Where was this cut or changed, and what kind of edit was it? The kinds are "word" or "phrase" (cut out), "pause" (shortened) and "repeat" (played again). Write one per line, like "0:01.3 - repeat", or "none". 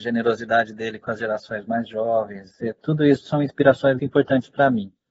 0:04.0 - word